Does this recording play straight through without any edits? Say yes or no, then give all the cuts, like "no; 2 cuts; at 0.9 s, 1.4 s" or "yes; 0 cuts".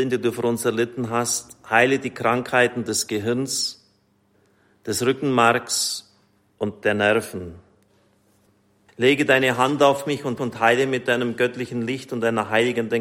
no; 1 cut; at 10.4 s